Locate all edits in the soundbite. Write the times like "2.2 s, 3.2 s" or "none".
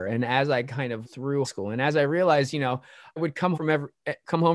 1.0 s, 1.4 s, 3.2 s, 3.5 s

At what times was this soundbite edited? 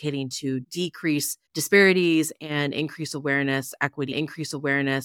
1.5 s, 4.1 s

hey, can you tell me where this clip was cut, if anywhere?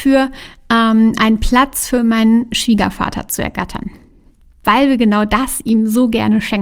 none

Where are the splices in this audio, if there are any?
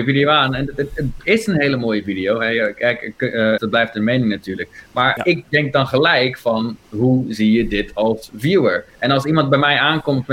3.6 s, 5.2 s, 6.8 s, 8.9 s

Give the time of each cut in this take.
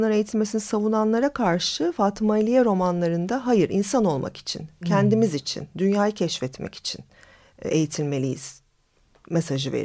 none

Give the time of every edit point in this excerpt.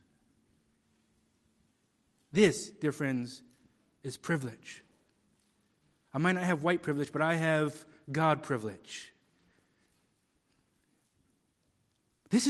none

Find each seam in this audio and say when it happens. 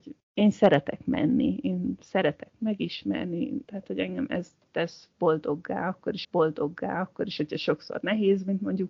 3.6 s, 6.2 s

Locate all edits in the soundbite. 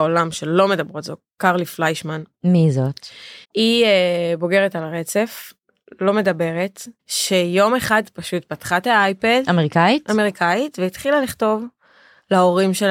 2.3 s, 3.4 s, 7.0 s

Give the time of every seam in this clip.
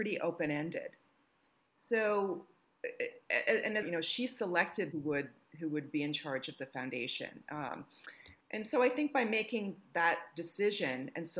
3.8 s, 4.9 s, 8.4 s

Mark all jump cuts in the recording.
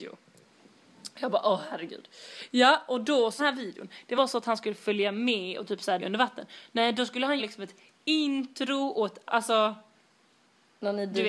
3.4 s, 4.2 s, 6.0 s, 7.4 s, 9.3 s

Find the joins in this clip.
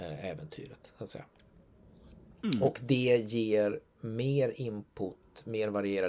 none

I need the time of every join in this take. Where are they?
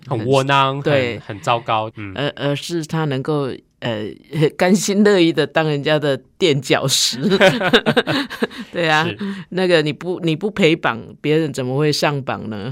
1.9 s

